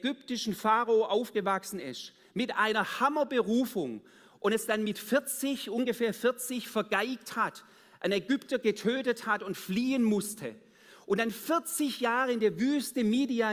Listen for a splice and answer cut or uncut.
uncut